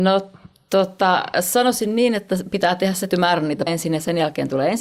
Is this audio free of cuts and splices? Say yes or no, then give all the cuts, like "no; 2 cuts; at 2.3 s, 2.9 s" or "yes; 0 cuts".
no; 2 cuts; at 3.1 s, 3.7 s